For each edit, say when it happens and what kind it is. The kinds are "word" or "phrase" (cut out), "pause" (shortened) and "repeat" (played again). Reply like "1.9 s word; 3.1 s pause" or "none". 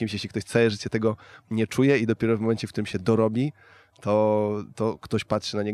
none